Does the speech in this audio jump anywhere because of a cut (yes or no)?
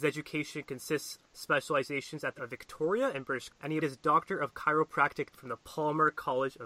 yes